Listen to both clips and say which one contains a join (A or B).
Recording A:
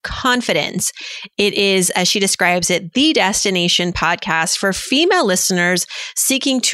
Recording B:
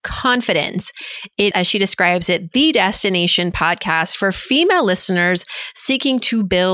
B